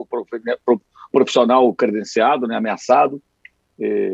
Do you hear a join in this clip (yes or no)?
yes